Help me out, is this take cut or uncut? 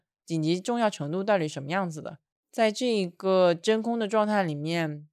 cut